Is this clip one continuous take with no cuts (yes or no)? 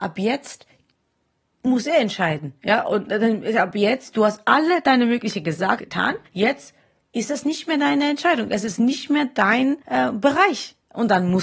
no